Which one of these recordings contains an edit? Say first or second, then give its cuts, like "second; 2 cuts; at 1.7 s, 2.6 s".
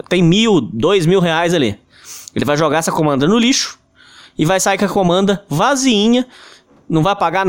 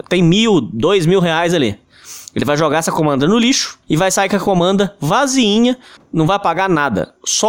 second; 2 cuts; at 3.8 s, 6.0 s